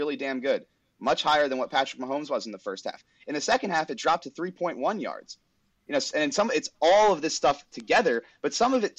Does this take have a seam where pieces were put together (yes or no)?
no